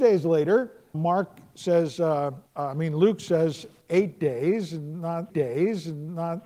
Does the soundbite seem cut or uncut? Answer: cut